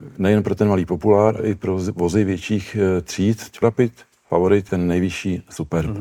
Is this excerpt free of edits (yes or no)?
no